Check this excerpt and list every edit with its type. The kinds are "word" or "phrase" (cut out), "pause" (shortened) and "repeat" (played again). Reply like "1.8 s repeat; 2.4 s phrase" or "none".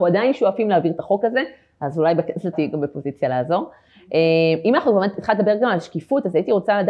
2.5 s word